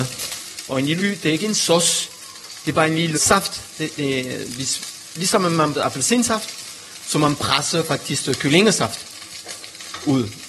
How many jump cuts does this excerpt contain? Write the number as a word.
four